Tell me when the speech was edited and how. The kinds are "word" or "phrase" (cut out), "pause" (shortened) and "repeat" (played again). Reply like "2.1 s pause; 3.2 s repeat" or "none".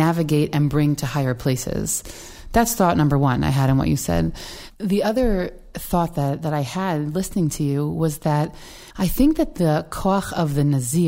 8.9 s pause